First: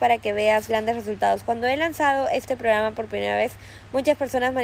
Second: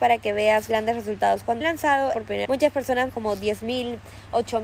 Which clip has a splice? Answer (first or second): second